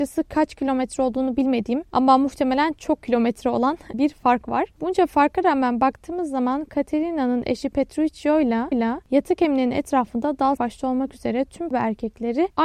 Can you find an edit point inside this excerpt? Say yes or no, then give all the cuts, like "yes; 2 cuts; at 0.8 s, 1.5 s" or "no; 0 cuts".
yes; 4 cuts; at 3.9 s, 8.7 s, 10.6 s, 11.7 s